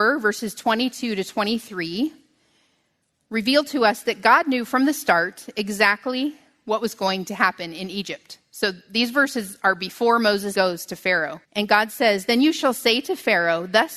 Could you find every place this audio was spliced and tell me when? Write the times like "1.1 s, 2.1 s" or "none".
10.5 s, 11.4 s